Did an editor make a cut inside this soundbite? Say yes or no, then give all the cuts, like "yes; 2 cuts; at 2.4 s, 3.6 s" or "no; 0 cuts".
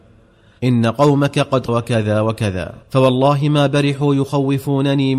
yes; 2 cuts; at 1.7 s, 2.8 s